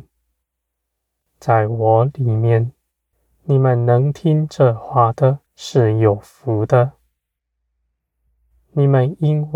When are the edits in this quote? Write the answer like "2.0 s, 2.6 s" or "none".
3.1 s, 5.5 s